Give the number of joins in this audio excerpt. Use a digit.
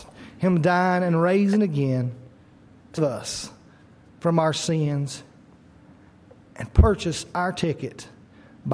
1